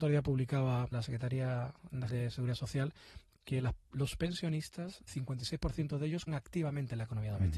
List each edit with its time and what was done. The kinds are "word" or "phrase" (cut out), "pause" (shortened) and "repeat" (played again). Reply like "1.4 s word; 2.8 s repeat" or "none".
0.9 s word; 2.1 s word; 5.1 s word; 6.3 s word